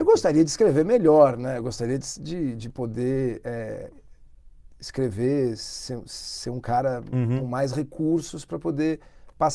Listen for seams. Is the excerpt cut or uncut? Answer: uncut